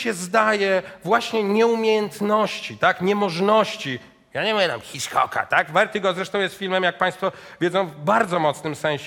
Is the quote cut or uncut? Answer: uncut